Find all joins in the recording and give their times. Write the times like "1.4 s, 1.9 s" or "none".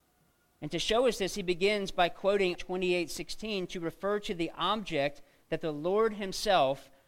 2.5 s